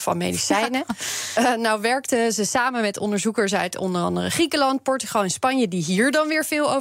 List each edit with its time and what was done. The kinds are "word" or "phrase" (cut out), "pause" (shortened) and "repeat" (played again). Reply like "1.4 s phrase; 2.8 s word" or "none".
none